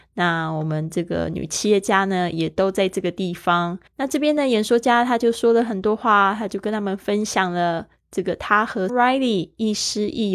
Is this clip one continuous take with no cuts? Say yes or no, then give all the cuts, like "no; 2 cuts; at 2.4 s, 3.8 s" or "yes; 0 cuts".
no; 3 cuts; at 2.3 s, 3.9 s, 8.9 s